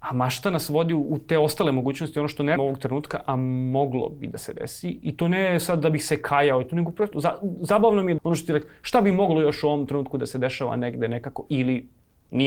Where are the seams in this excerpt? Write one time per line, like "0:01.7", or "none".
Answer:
0:02.6
0:07.1
0:08.2